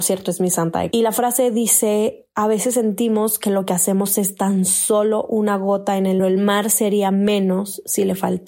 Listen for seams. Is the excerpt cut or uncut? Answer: cut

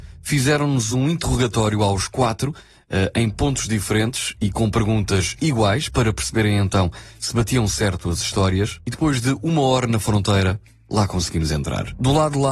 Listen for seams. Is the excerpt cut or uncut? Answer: uncut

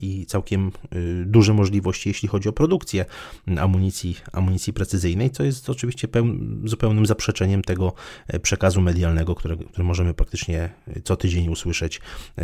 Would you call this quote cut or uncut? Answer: uncut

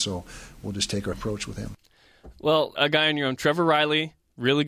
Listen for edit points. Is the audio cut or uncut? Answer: cut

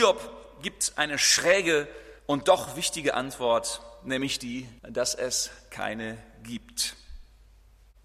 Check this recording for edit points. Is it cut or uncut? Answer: cut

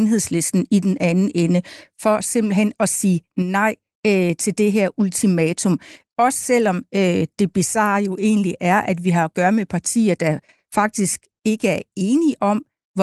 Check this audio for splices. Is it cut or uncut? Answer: uncut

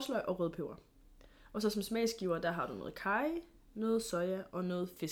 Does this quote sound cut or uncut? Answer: uncut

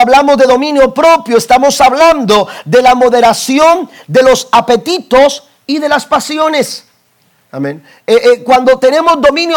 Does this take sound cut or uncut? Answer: uncut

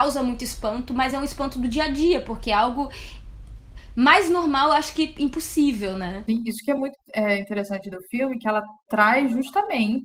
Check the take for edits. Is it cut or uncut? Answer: uncut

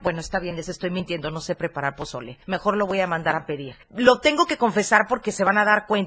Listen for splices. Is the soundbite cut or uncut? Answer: cut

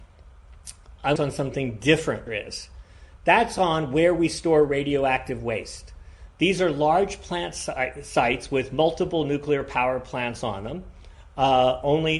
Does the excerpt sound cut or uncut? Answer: cut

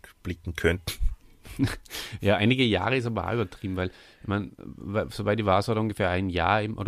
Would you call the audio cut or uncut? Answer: uncut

